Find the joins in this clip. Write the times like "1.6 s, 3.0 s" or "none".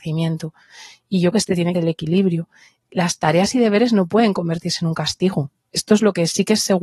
1.3 s, 1.7 s